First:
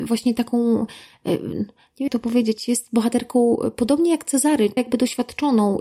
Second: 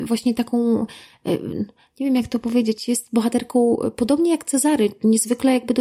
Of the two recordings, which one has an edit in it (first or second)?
first